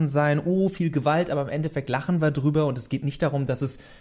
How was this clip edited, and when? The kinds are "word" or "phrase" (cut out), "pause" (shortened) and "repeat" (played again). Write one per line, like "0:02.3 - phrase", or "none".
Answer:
none